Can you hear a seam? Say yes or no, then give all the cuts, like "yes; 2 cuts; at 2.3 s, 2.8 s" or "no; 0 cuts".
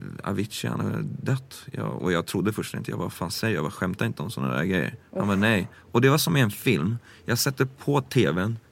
no; 0 cuts